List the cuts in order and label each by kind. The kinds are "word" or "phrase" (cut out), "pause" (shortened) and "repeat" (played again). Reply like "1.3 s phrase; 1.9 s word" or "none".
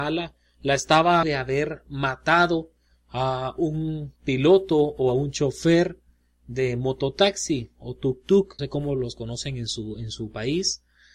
1.2 s word; 8.6 s word